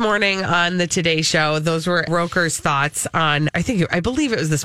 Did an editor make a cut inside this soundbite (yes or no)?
yes